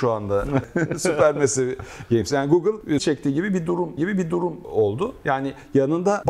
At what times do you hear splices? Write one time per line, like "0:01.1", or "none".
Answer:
0:03.0
0:04.0